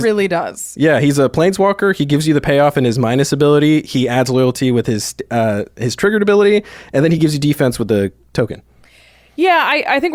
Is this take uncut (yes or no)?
yes